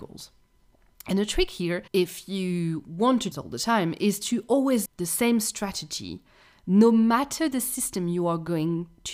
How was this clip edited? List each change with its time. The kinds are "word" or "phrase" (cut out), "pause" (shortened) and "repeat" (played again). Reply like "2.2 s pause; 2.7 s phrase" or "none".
1.9 s pause; 3.3 s phrase; 4.9 s phrase